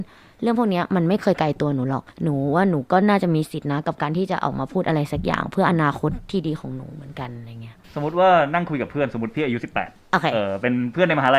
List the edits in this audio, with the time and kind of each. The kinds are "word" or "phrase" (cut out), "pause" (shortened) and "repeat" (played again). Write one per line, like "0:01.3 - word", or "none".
0:02.1 - pause
0:07.8 - pause